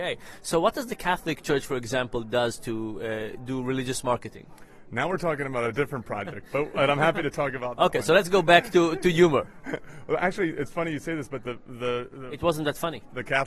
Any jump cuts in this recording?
no; 0 cuts

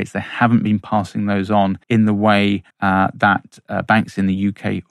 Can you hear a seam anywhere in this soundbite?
yes; 2 cuts; at 1.8 s, 2.7 s

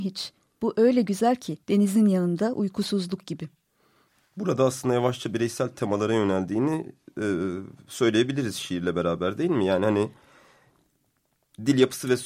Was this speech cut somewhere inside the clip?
yes; 2 cuts; at 1.6 s, 4.1 s

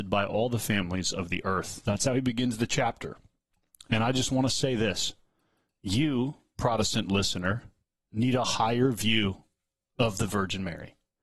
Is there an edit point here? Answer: no; 0 cuts

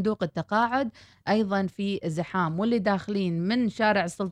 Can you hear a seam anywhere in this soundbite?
no; 0 cuts

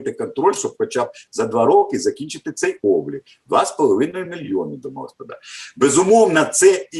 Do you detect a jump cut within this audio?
no; 0 cuts

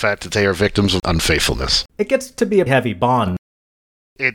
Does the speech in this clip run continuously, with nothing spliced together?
no; 2 cuts; at 1.9 s, 2.7 s

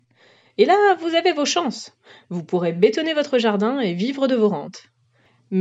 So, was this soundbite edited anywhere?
no; 0 cuts

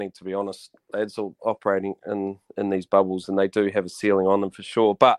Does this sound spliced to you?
no; 0 cuts

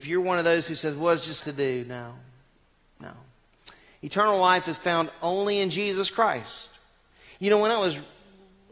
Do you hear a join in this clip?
yes; 1 cut; at 1.4 s

